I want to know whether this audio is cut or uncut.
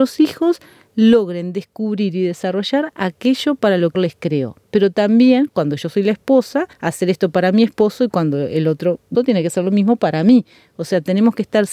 cut